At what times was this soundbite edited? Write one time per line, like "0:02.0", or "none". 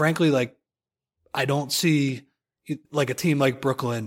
0:02.8